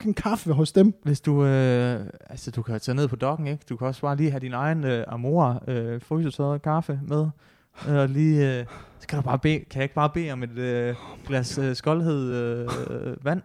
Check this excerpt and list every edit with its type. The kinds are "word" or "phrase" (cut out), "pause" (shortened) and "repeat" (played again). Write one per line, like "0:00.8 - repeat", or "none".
none